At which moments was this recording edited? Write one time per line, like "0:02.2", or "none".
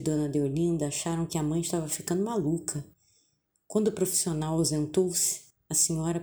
none